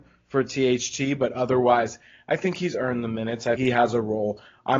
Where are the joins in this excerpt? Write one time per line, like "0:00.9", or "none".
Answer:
0:03.6